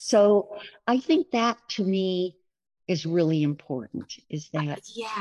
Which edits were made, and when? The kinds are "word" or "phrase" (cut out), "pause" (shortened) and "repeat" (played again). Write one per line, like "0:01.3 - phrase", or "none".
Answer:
0:02.7 - pause

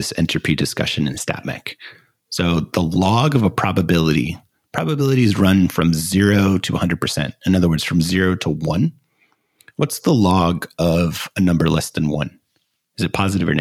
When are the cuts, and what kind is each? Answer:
none

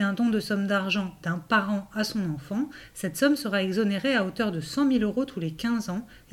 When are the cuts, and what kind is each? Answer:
none

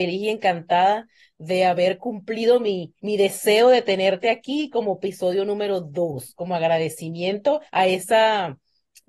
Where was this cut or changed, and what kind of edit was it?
0:03.0 - pause
0:07.7 - pause

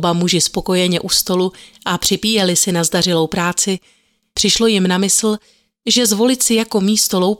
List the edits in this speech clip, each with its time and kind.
none

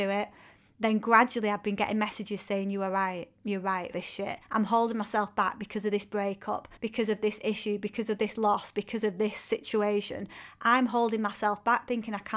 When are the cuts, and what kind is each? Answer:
0:03.9 - word
0:04.4 - pause
0:06.8 - pause

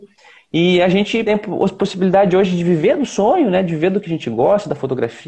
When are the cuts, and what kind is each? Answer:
0:01.3 - word

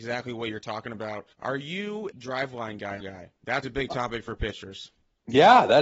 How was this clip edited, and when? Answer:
0:01.3 - pause
0:02.1 - word
0:03.0 - phrase
0:03.6 - word

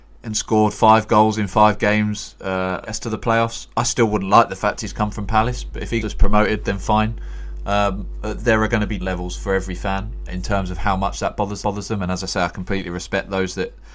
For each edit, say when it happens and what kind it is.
0:02.9 - phrase
0:06.0 - word
0:09.0 - word
0:10.3 - word
0:11.6 - repeat

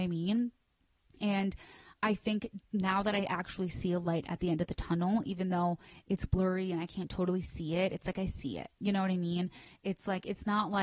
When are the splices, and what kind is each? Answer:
none

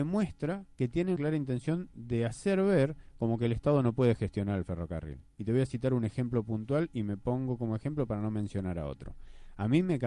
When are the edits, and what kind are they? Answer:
0:01.2 - word

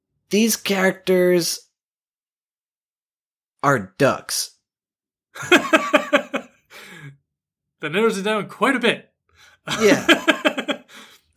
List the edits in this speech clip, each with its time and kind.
none

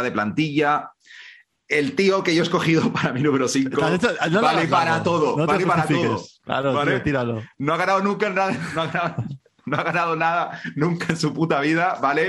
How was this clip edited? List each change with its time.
none

